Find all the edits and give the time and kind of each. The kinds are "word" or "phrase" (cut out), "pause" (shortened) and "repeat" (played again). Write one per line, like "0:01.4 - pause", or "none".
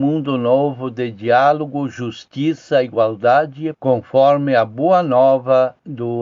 0:03.7 - word